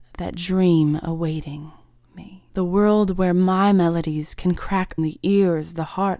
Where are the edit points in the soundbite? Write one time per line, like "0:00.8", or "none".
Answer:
0:02.5
0:05.0

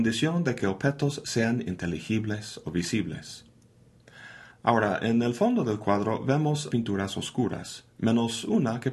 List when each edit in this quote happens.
0:06.7

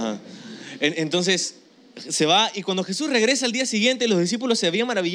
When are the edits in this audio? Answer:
none

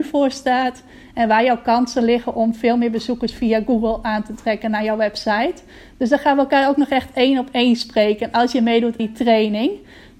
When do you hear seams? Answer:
0:09.0

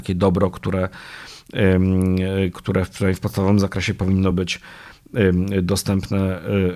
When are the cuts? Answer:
none

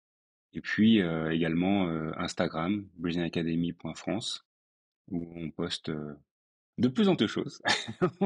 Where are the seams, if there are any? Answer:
0:07.2

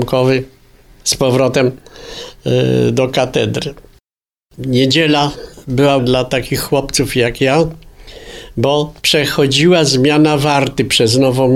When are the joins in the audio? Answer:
0:06.0
0:09.0

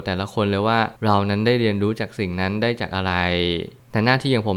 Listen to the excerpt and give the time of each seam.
0:01.0

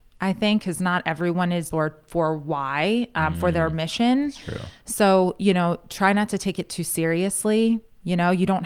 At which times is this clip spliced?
0:01.7

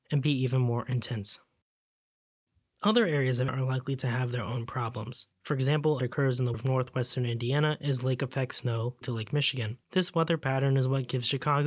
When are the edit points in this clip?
0:03.5
0:05.3
0:06.0
0:06.5
0:09.0
0:09.8

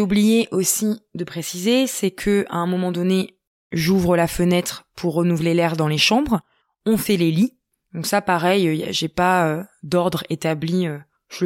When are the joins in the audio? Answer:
none

